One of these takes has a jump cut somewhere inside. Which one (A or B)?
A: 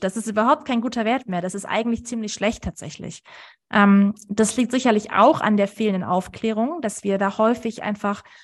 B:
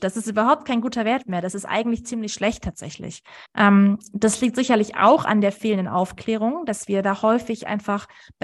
B